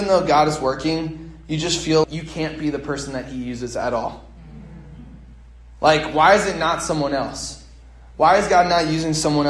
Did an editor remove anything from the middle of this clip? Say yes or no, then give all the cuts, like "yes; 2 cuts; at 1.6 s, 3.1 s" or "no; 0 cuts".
yes; 1 cut; at 2.0 s